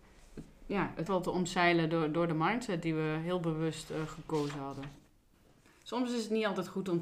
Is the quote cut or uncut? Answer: cut